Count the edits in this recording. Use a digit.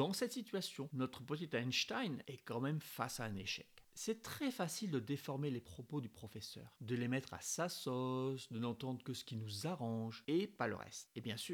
0